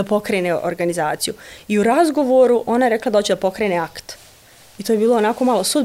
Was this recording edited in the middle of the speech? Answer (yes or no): no